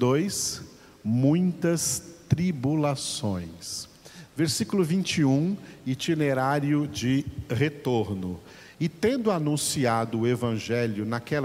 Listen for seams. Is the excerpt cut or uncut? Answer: uncut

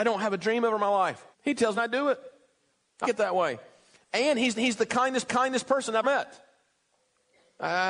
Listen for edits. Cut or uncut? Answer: cut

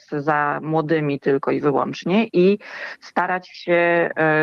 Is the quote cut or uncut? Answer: uncut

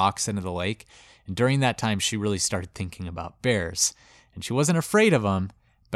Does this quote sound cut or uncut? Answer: uncut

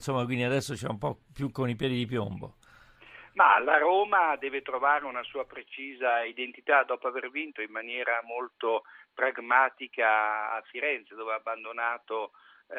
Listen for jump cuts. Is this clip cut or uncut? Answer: uncut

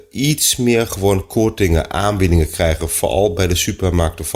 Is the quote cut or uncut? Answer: uncut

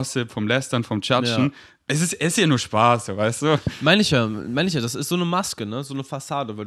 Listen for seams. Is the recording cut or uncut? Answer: uncut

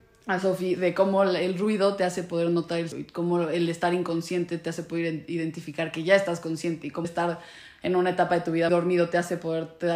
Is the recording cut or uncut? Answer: cut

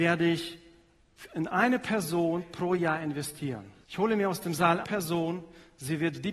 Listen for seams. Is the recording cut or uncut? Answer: cut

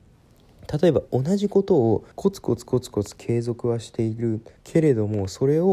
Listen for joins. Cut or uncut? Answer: cut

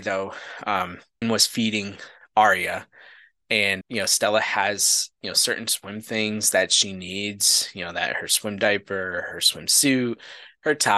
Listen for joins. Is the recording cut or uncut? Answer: cut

